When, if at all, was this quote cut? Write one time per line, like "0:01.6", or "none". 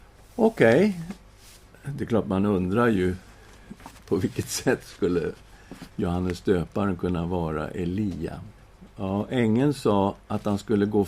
0:04.0
0:05.9
0:08.6